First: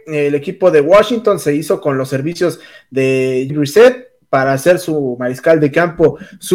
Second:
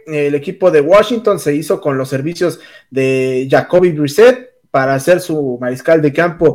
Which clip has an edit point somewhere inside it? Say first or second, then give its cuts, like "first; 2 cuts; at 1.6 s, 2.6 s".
first; 1 cut; at 3.5 s